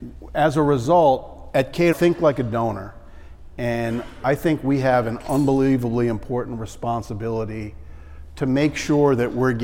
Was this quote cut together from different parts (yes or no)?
yes